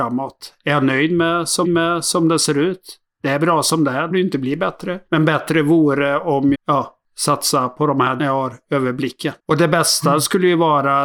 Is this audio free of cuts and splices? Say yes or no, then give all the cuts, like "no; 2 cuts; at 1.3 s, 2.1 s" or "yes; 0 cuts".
no; 6 cuts; at 1.6 s, 4.1 s, 5.1 s, 6.5 s, 8.2 s, 9.4 s